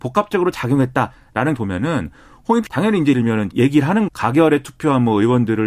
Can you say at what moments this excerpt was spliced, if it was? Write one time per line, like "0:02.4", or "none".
0:01.6
0:02.7
0:03.1
0:03.5
0:04.1

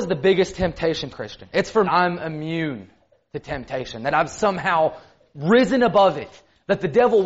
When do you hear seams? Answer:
0:01.1
0:01.9

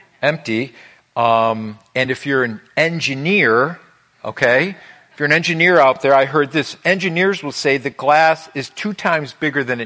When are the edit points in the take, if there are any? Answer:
none

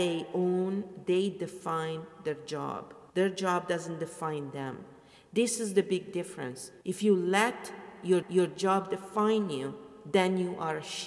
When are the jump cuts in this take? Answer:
0:03.1
0:06.8
0:08.2

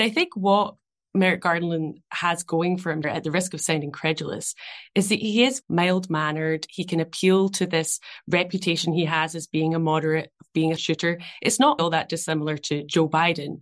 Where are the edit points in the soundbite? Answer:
0:03.0
0:05.6
0:10.8
0:11.8

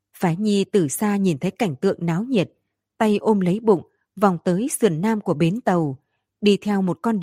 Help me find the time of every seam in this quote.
none

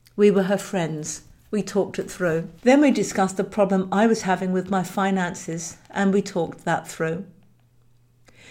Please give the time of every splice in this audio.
0:02.6

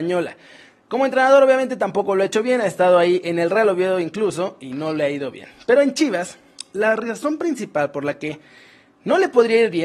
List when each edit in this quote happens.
none

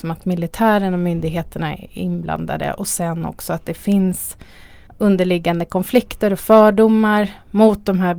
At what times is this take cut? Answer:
0:04.9

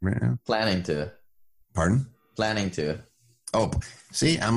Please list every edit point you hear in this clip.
none

